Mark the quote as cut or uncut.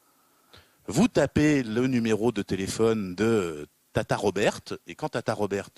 uncut